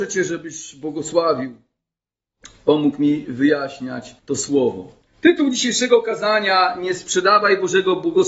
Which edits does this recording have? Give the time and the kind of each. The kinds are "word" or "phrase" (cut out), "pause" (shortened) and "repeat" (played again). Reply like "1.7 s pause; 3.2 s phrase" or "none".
4.2 s pause; 5.1 s pause